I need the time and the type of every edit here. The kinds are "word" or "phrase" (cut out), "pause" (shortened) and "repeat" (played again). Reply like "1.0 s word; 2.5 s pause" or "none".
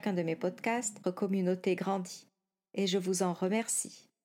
1.0 s word

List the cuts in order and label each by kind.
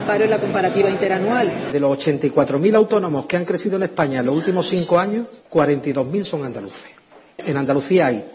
none

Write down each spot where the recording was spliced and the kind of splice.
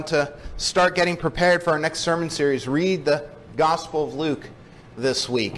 none

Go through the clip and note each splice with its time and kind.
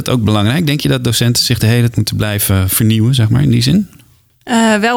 1.9 s word

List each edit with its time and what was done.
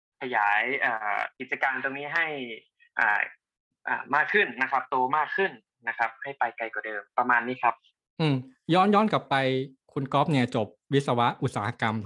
1.3 s pause

